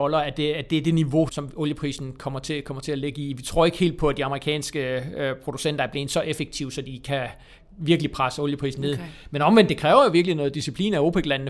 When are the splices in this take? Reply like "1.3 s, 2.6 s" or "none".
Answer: 1.3 s